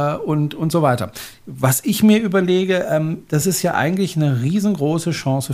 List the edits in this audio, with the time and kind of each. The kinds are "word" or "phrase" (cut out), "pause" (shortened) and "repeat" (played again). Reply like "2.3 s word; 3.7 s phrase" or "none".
none